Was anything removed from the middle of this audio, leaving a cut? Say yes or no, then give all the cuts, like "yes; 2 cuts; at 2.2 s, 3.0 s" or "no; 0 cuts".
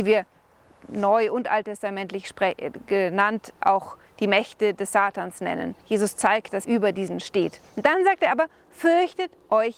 yes; 2 cuts; at 5.8 s, 6.6 s